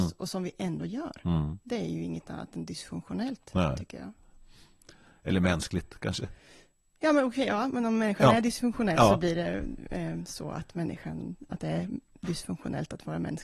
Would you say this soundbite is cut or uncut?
uncut